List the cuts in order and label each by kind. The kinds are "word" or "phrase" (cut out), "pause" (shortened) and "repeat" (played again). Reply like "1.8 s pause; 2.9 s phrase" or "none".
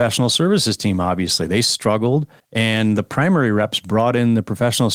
2.4 s pause

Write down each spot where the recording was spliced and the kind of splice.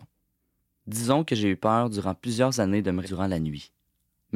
3.0 s word

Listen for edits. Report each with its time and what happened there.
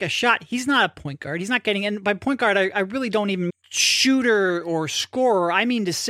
3.5 s word

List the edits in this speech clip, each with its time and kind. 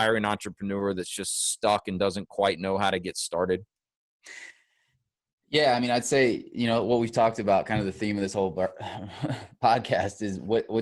none

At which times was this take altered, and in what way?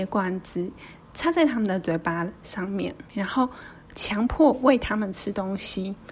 3.1 s pause

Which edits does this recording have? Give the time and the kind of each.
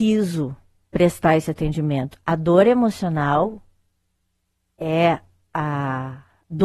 none

